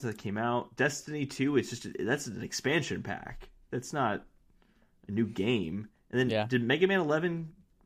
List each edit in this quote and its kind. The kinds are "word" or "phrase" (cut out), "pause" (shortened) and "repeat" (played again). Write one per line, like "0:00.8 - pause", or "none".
0:06.0 - pause